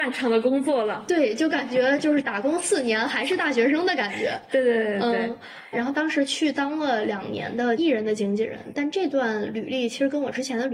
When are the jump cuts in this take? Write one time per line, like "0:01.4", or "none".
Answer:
none